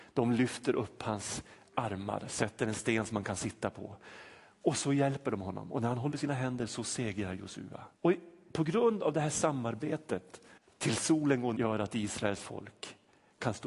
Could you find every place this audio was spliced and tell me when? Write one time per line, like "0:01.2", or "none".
0:06.1
0:08.0
0:10.6
0:11.6